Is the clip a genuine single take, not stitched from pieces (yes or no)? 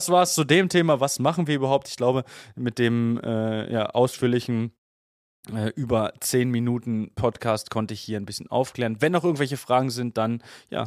yes